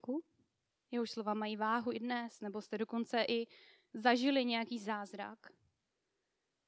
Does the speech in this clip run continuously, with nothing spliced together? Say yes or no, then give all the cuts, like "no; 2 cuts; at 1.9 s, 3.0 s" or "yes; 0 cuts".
yes; 0 cuts